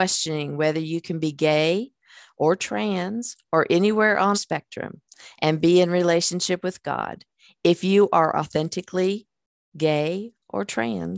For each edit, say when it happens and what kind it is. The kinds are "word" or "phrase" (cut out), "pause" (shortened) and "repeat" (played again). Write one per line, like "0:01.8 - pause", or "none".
0:04.3 - word